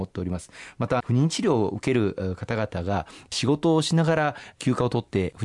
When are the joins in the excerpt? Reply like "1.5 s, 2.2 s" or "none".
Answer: 1.0 s